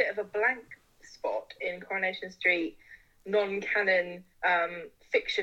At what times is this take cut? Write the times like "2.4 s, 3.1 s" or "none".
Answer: 4.3 s